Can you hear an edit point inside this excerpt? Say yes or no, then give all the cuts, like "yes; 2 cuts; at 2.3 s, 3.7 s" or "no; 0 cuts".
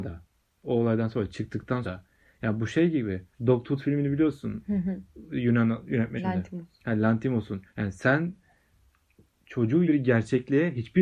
yes; 5 cuts; at 1.8 s, 3.3 s, 6.2 s, 7.7 s, 9.9 s